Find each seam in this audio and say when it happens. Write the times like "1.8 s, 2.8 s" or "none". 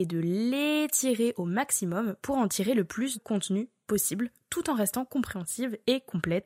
3.1 s